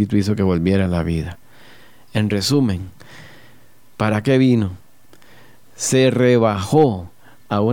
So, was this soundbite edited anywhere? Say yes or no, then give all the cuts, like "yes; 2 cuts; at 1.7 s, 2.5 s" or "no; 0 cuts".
no; 0 cuts